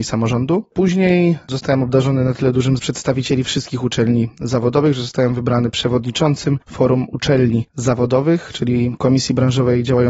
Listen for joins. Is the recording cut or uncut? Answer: cut